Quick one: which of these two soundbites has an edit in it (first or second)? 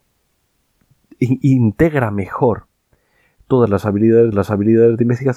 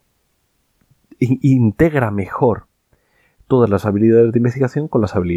first